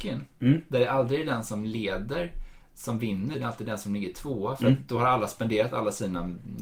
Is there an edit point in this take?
yes; 1 cut; at 3.3 s

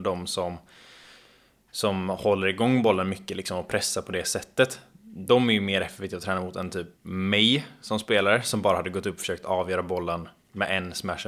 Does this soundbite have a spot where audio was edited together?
yes; 1 cut; at 7.0 s

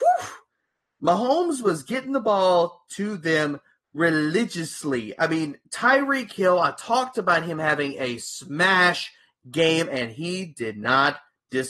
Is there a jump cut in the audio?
no; 0 cuts

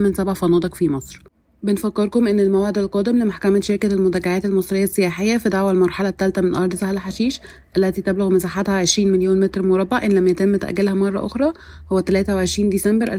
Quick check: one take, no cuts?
yes; 0 cuts

